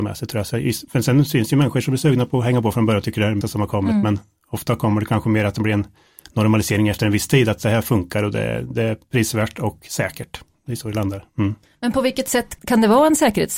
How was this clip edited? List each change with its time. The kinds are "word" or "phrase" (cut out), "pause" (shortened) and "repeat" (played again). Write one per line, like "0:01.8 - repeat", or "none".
0:03.4 - word
0:12.6 - word